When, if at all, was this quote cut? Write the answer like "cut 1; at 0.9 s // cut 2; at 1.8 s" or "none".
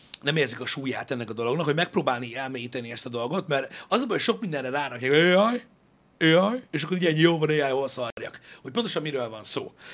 cut 1; at 6.7 s